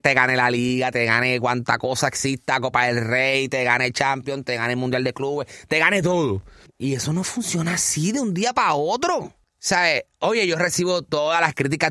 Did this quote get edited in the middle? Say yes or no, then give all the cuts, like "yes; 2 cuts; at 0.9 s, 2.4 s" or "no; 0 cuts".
no; 0 cuts